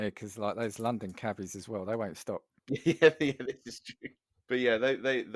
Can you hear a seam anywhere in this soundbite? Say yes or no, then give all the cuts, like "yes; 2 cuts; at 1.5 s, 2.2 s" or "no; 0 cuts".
no; 0 cuts